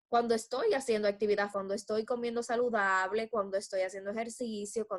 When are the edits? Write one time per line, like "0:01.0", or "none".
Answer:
0:01.5